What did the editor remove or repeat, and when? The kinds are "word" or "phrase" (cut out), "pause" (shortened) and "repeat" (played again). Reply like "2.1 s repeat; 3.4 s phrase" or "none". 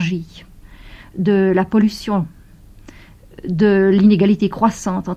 none